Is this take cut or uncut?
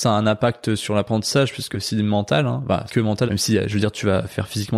cut